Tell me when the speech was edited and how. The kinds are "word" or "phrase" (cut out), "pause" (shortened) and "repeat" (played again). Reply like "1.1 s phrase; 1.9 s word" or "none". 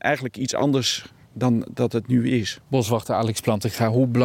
2.6 s pause